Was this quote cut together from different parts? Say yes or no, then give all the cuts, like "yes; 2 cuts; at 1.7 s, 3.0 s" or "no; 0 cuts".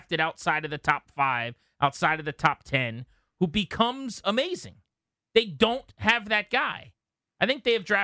no; 0 cuts